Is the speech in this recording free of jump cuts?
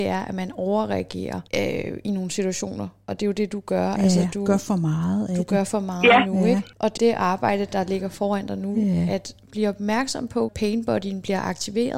no; 2 cuts; at 7.0 s, 10.5 s

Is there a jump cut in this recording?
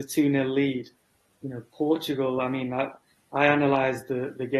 no; 0 cuts

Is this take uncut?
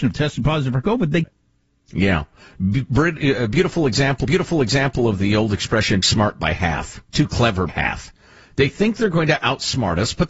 no; 5 cuts; at 1.2 s, 4.2 s, 6.0 s, 7.1 s, 7.7 s

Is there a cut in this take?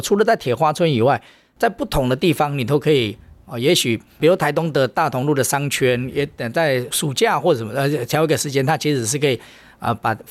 no; 0 cuts

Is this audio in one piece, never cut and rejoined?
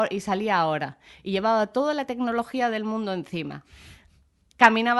yes; 0 cuts

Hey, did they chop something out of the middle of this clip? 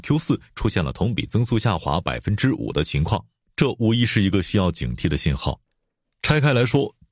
no; 0 cuts

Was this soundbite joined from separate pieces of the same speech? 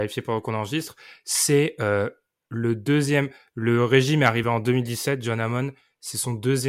no; 0 cuts

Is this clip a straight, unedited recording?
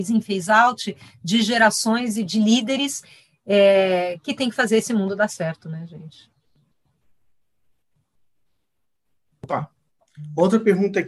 yes; 0 cuts

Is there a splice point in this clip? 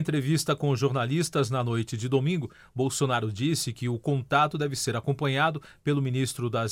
no; 0 cuts

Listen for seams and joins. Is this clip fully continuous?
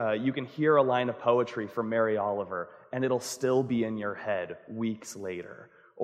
yes; 0 cuts

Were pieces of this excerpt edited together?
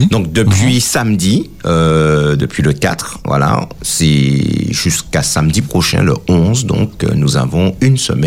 no; 0 cuts

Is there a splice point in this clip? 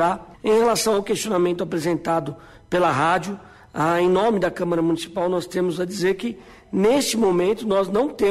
no; 0 cuts

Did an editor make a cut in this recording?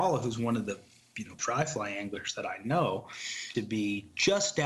yes; 2 cuts; at 1.4 s, 3.5 s

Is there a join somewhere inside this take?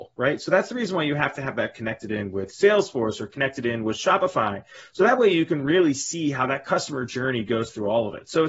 no; 0 cuts

